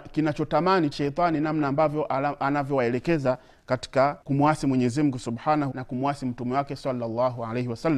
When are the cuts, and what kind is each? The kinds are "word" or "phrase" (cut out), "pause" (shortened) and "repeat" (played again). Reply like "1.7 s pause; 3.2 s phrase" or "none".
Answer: 0.9 s phrase; 4.2 s pause; 5.7 s word